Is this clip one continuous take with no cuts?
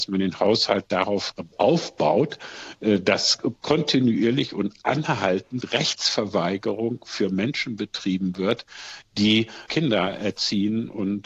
yes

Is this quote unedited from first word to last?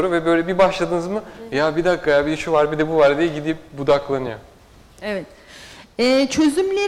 yes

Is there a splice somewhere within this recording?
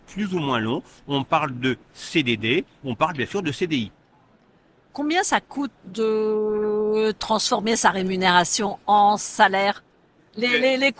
no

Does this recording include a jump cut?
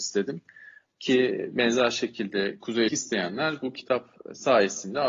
yes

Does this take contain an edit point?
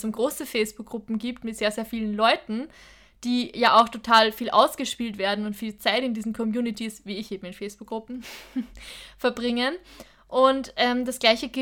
no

